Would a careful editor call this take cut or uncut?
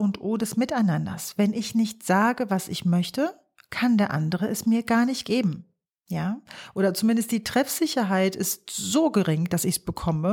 uncut